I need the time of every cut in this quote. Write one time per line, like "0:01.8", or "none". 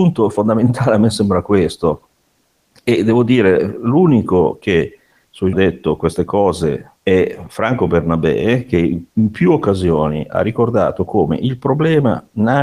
0:05.5
0:07.0

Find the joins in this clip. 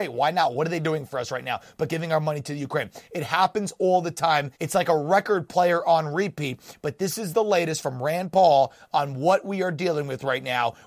0:04.5

